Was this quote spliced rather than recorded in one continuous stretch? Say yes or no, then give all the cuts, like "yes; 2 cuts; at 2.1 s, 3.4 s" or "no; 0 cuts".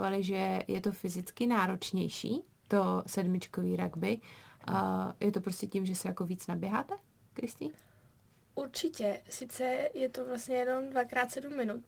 no; 0 cuts